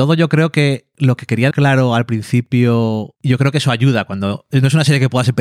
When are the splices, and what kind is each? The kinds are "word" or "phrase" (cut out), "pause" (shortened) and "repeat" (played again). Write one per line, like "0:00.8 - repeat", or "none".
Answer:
0:01.5 - word